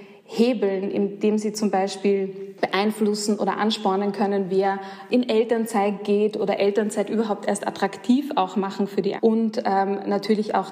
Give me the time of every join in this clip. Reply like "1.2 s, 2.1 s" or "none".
9.2 s